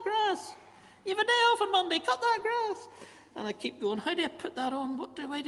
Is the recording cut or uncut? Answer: uncut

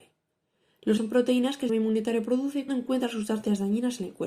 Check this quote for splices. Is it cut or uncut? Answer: cut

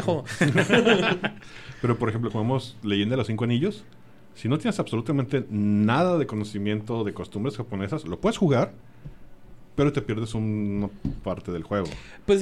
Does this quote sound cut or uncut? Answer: cut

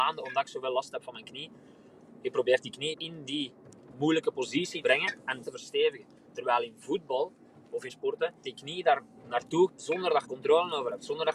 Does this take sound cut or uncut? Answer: cut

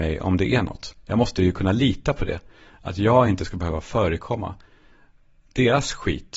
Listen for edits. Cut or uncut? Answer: uncut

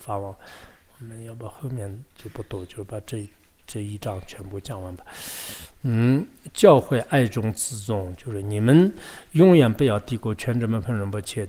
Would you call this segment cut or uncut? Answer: uncut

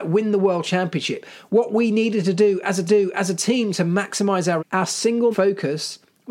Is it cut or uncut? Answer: cut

